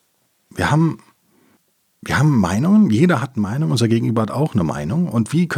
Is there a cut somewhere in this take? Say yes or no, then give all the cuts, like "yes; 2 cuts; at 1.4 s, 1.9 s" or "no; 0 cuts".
no; 0 cuts